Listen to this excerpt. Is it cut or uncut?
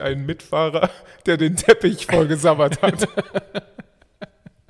uncut